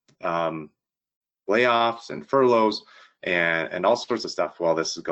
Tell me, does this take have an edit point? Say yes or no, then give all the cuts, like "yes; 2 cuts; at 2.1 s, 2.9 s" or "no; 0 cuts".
no; 0 cuts